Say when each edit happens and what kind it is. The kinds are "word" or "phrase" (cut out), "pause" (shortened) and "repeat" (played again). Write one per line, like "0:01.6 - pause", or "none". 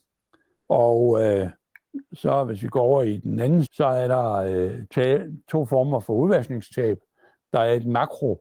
0:03.7 - word
0:04.9 - word